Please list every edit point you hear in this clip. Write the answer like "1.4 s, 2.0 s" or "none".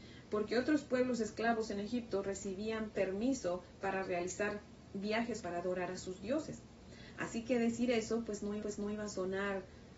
5.4 s, 8.6 s